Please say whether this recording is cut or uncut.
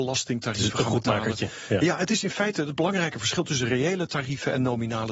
uncut